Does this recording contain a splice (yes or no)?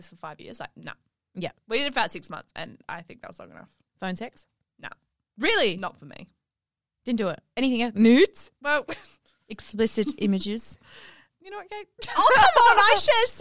yes